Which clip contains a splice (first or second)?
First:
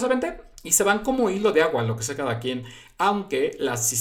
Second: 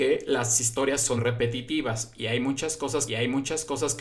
second